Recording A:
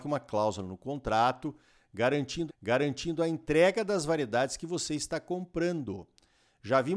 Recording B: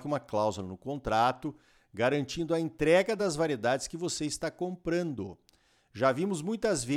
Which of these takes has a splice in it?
A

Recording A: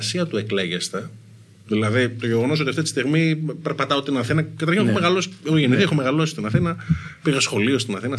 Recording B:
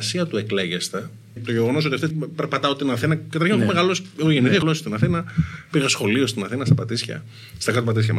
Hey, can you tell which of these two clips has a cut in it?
B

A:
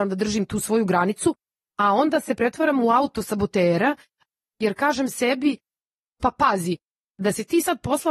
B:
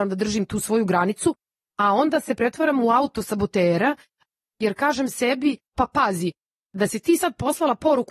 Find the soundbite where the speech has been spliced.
B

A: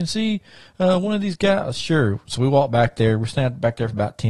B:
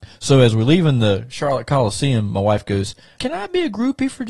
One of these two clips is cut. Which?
B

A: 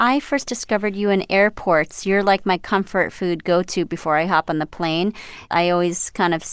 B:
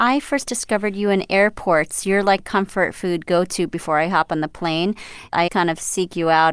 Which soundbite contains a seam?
B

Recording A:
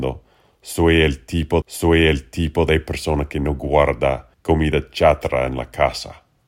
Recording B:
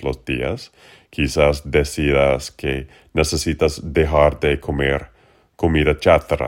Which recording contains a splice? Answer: A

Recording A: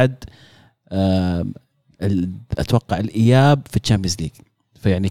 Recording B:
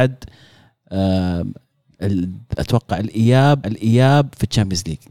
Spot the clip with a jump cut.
B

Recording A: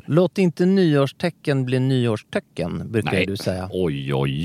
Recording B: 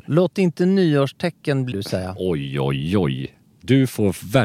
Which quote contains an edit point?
B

